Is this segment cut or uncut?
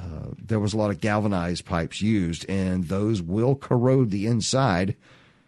uncut